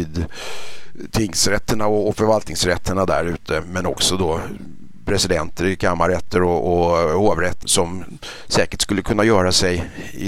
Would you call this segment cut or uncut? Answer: cut